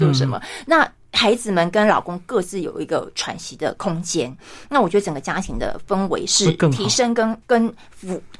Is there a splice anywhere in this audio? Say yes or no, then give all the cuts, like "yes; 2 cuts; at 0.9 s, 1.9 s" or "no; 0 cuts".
yes; 1 cut; at 7.4 s